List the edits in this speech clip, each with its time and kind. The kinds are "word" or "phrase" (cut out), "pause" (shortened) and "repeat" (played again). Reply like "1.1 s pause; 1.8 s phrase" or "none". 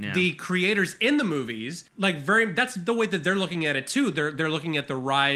1.9 s pause